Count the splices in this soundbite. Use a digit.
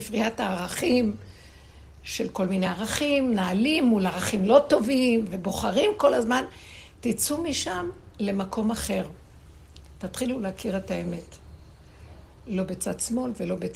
0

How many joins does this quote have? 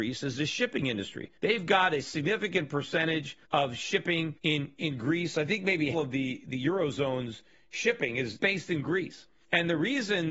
4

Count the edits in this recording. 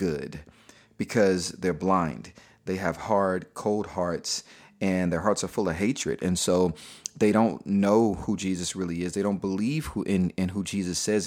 0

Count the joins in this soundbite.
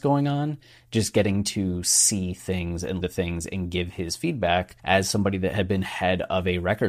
2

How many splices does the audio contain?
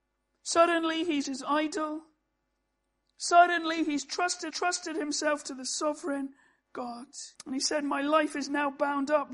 3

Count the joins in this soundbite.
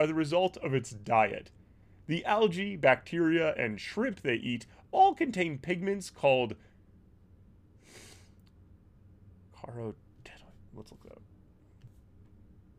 0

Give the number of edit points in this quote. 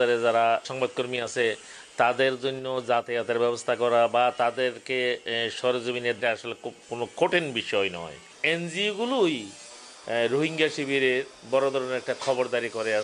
2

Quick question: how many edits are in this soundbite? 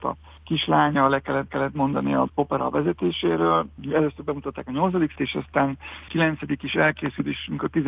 3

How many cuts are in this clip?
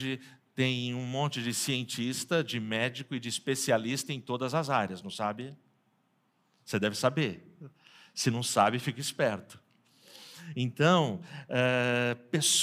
0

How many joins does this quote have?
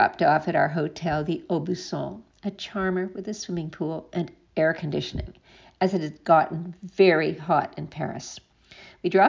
0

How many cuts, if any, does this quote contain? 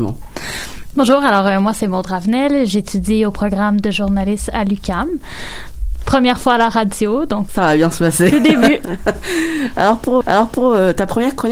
2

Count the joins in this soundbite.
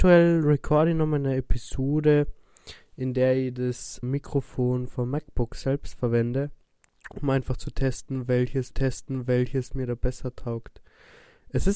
3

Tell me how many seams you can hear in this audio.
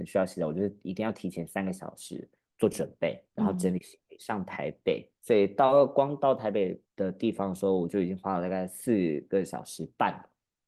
4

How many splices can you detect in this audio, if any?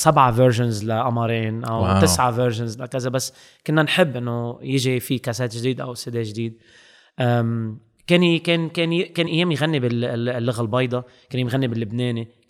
0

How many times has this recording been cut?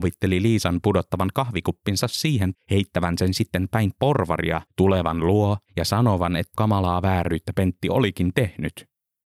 4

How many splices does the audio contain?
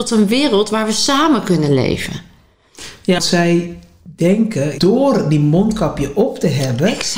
2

